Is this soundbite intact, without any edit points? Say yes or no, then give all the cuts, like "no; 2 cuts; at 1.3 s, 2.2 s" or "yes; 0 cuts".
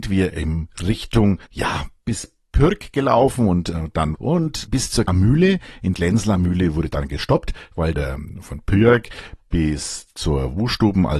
no; 6 cuts; at 1.5 s, 4.1 s, 4.7 s, 5.1 s, 5.9 s, 7.9 s